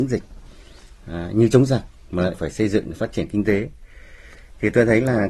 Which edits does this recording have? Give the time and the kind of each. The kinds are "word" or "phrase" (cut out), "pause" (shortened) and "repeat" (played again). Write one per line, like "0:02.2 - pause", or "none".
0:02.3 - word

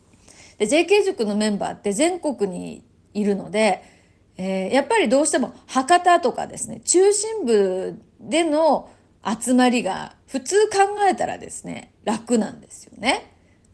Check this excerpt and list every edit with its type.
none

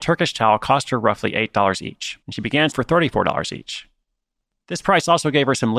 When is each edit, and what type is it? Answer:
0:02.2 - pause
0:02.7 - phrase

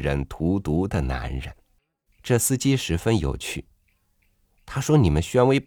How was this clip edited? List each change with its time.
0:01.8 - pause

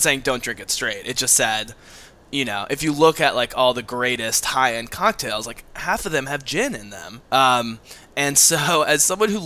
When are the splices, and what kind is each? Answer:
0:07.2 - pause

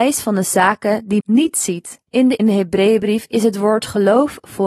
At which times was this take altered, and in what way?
0:01.2 - word
0:02.1 - pause
0:02.4 - phrase

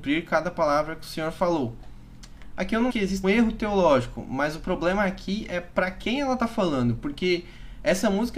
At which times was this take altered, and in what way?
0:02.9 - word
0:03.2 - word

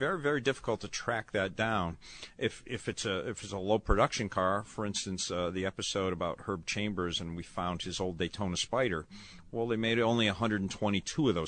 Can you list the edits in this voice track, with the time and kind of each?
none

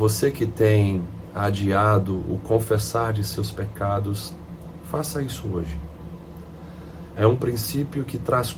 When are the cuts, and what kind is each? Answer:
none

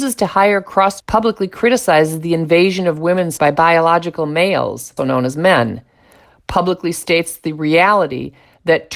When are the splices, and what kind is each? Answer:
0:01.0 - phrase
0:03.4 - word
0:05.0 - word

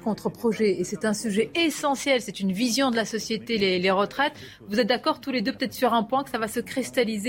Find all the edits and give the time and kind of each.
none

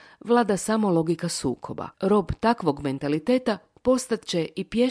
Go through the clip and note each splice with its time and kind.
0:01.9 - pause

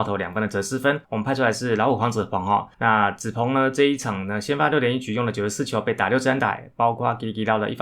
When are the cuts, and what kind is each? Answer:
0:01.0 - pause
0:02.7 - pause

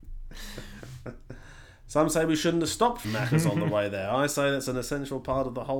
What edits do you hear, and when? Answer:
0:03.0 - phrase

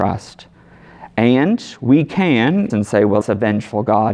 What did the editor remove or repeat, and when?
0:02.7 - phrase
0:03.2 - word

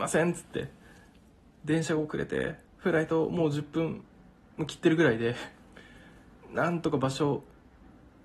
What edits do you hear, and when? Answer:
0:02.7 - pause

